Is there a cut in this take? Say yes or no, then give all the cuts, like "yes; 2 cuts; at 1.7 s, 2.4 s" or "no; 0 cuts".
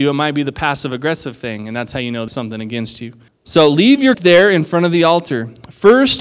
yes; 3 cuts; at 2.3 s, 3.3 s, 4.1 s